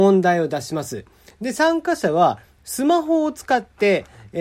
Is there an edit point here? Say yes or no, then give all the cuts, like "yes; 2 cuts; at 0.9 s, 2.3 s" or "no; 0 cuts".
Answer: no; 0 cuts